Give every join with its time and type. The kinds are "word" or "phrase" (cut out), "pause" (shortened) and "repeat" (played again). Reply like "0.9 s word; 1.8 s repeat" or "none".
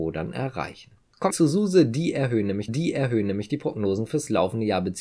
1.3 s word; 2.7 s repeat